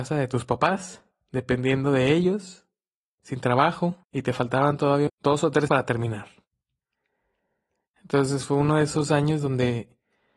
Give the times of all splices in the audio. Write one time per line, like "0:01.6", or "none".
0:04.0
0:05.1
0:05.7